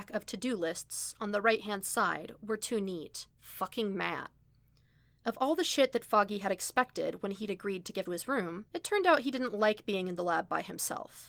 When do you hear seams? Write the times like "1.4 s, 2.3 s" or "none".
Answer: 3.3 s, 8.1 s, 8.7 s